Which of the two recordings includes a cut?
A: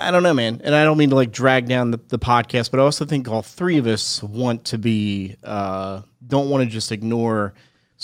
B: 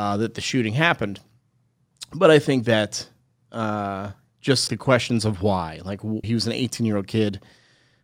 B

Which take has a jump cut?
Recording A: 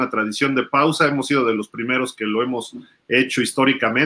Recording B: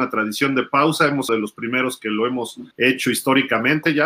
B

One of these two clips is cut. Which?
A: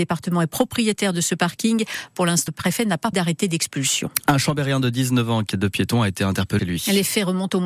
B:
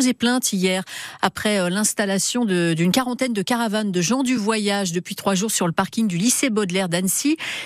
A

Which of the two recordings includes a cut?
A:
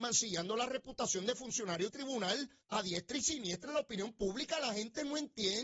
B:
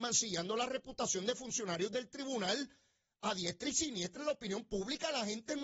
A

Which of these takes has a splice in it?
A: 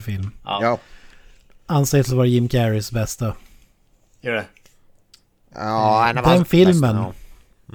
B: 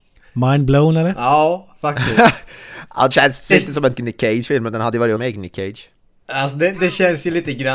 B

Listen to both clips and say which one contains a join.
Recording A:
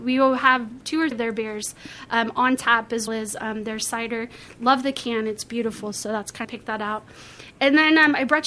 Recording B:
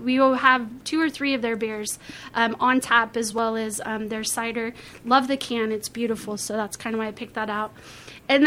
A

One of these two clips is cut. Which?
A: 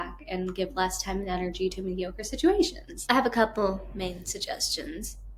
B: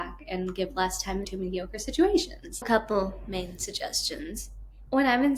B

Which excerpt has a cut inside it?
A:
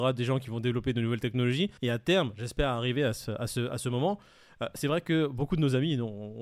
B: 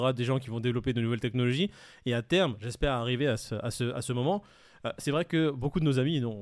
A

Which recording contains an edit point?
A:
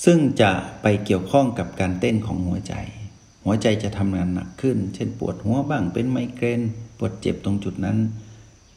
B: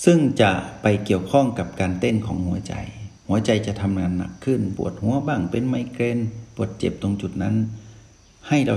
B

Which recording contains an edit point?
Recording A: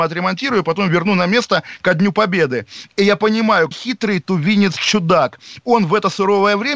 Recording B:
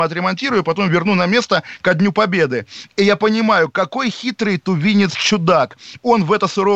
A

